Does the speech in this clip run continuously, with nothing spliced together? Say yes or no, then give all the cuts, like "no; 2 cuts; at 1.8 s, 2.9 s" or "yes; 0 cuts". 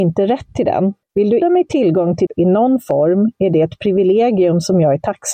no; 3 cuts; at 1.0 s, 1.4 s, 2.3 s